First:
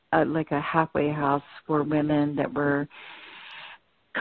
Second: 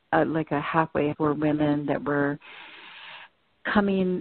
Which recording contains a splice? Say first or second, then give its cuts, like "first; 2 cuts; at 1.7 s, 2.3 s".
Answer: second; 1 cut; at 1.1 s